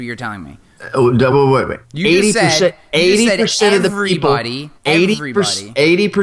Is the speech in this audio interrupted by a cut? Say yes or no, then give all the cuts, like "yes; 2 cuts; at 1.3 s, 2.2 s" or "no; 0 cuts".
yes; 3 cuts; at 1.3 s, 1.8 s, 4.8 s